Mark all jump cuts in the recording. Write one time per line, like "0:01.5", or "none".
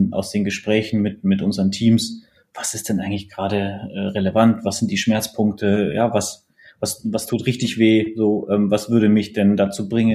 none